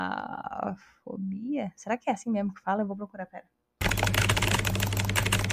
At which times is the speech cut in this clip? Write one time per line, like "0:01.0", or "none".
none